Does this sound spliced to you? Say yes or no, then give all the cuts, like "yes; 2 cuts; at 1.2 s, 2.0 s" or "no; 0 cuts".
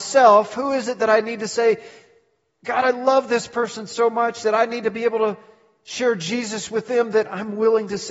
no; 0 cuts